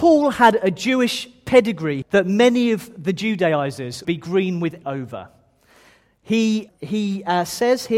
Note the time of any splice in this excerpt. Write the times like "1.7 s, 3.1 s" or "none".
2.0 s, 4.0 s, 4.8 s, 6.7 s